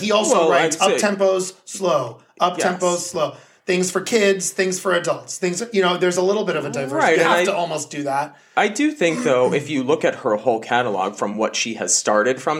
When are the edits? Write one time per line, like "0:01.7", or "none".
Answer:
none